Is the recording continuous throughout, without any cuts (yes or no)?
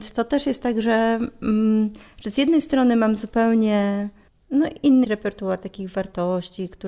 no